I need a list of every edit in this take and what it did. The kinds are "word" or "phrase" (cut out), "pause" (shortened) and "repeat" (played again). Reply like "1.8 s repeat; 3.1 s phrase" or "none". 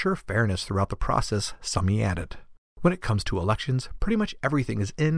none